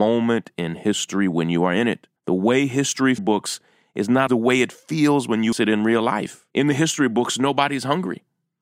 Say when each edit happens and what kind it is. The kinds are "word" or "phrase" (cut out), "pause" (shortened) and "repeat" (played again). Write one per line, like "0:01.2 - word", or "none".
0:02.2 - pause
0:03.2 - phrase
0:04.3 - word
0:05.5 - word
0:06.5 - pause